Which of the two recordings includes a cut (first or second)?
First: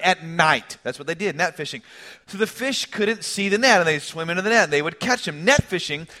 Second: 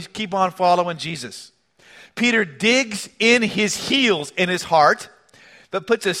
first